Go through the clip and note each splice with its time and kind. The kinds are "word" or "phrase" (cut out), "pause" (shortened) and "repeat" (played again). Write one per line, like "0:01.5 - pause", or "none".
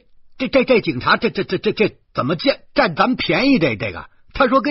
none